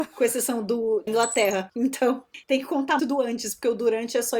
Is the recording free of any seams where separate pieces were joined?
no; 3 cuts; at 1.1 s, 2.4 s, 3.0 s

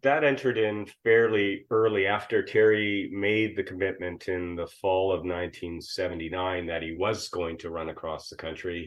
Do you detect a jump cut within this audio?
no; 0 cuts

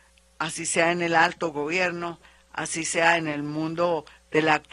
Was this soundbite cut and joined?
no; 0 cuts

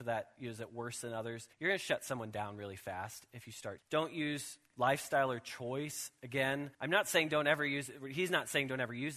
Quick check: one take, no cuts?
no; 3 cuts; at 1.5 s, 3.8 s, 6.7 s

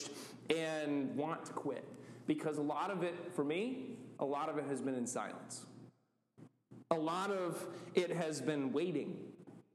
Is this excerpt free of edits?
yes; 0 cuts

